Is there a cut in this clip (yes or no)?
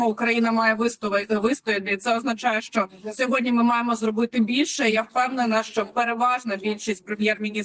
no